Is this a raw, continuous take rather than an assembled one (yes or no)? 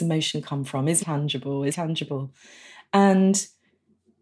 no